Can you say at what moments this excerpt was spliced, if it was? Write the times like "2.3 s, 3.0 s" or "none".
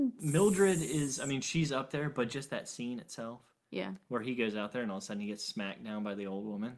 none